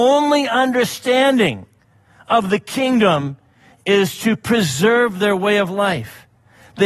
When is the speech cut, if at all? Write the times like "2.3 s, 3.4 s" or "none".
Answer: none